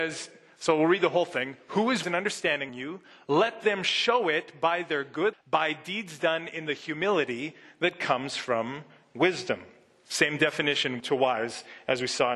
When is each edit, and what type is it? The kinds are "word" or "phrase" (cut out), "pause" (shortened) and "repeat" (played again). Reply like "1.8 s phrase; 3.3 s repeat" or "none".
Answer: 2.0 s word; 2.7 s word; 5.3 s word; 11.0 s word